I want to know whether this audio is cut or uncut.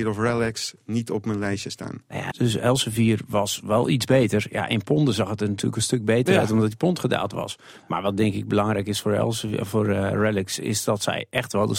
cut